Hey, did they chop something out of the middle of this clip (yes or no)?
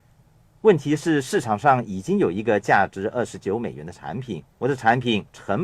yes